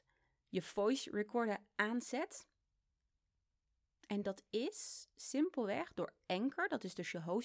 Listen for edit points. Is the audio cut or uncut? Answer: uncut